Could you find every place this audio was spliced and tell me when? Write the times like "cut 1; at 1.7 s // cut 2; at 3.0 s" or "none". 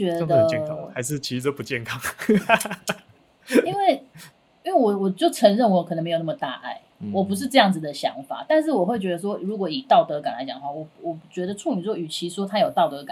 none